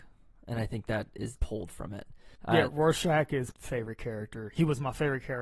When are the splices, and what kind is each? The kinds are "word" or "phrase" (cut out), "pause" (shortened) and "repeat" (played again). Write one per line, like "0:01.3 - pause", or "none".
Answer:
0:01.3 - phrase
0:02.3 - pause
0:02.7 - word
0:03.5 - word